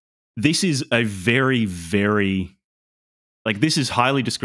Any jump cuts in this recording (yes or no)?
no